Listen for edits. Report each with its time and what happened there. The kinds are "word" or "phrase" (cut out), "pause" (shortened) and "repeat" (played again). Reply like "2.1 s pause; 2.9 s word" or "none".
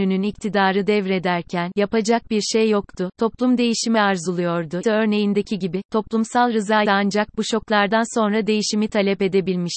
4.8 s word; 6.9 s word